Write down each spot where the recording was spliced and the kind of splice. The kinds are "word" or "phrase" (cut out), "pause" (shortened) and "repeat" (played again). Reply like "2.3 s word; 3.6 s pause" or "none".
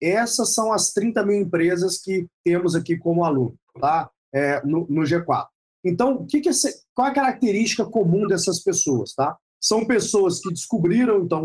2.3 s pause; 3.7 s pause; 5.7 s pause; 9.5 s pause